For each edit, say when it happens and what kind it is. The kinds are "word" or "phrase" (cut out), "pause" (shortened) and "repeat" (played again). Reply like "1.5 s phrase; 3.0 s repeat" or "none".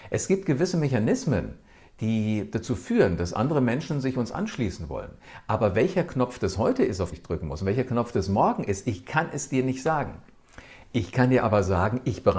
7.1 s word